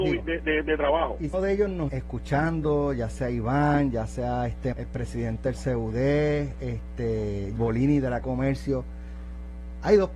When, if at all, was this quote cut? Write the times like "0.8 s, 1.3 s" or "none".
1.3 s, 1.9 s, 4.7 s, 7.6 s, 8.2 s